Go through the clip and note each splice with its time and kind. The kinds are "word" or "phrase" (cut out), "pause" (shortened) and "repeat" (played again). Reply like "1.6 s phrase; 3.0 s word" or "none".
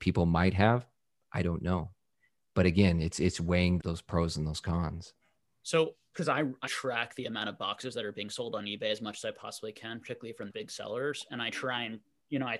3.8 s word; 6.1 s word; 6.7 s word; 10.5 s word